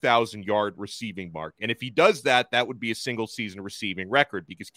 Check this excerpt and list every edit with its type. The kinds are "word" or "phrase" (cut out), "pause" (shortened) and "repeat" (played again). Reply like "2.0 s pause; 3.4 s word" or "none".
none